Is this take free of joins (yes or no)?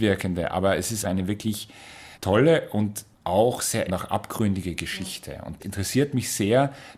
no